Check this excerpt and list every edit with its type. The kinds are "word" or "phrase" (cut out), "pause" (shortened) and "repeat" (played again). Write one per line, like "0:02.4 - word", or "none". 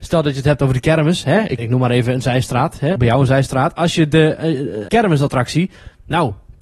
0:01.6 - word
0:03.0 - word
0:04.9 - word